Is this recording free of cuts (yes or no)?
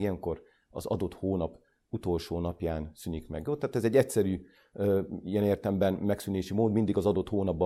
yes